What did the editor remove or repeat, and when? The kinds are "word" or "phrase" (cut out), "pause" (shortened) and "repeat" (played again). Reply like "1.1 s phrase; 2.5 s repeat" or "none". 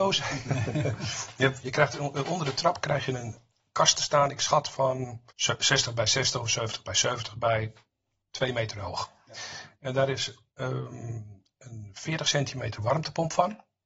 1.6 s word; 5.3 s pause